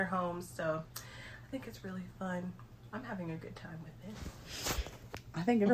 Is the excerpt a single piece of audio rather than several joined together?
yes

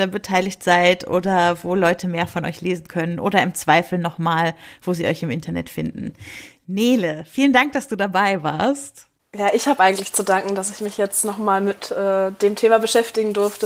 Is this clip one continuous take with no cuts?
yes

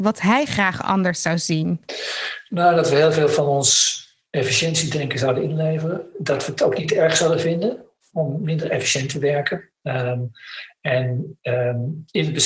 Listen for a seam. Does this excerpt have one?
no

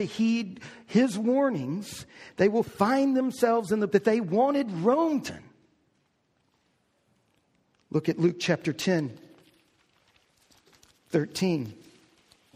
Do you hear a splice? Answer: yes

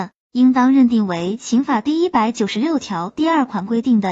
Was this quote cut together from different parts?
no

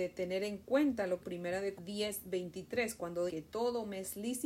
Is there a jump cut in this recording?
yes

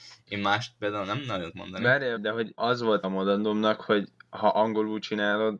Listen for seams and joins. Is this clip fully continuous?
no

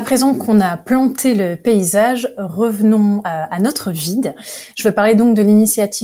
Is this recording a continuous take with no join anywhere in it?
yes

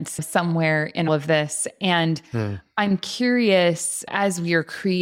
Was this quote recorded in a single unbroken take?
no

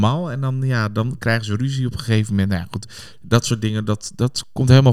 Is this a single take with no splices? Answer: yes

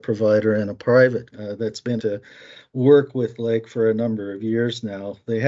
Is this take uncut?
no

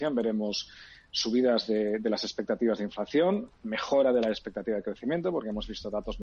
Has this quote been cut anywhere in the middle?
no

